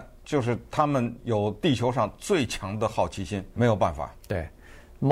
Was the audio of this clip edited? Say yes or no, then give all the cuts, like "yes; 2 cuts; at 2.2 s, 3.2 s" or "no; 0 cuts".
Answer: yes; 1 cut; at 3.6 s